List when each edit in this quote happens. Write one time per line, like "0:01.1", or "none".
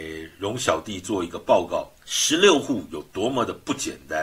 0:02.0